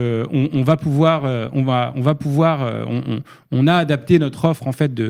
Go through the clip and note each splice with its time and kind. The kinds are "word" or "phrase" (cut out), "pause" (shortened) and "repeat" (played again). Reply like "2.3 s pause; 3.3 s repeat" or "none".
none